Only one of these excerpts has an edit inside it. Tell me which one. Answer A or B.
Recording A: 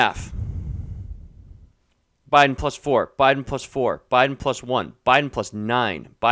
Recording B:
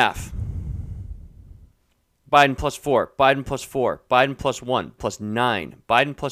B